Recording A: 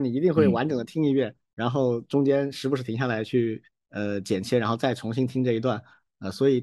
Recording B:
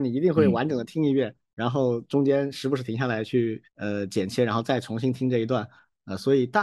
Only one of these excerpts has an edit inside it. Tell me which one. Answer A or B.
B